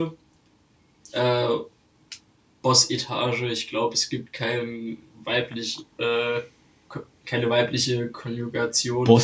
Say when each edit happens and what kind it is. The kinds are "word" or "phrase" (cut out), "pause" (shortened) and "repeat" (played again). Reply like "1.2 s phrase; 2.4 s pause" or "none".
none

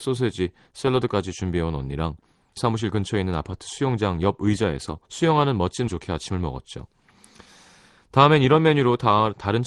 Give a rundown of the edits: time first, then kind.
2.6 s word; 5.0 s pause; 5.9 s phrase

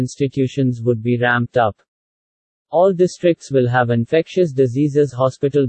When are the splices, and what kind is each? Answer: none

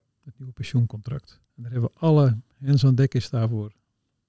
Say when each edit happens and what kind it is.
1.5 s pause

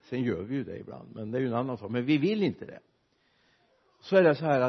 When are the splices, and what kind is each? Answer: none

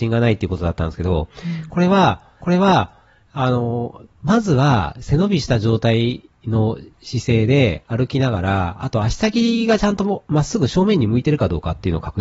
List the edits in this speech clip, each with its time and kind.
2.4 s repeat

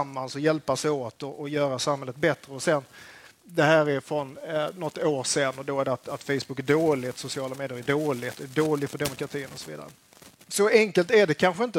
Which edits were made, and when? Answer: none

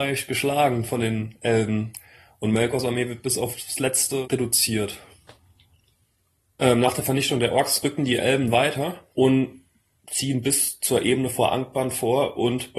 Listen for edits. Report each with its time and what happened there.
9.1 s pause

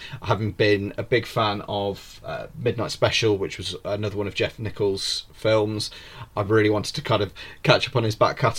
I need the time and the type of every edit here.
none

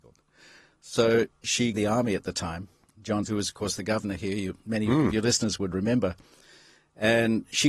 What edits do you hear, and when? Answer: 1.7 s phrase; 3.2 s word

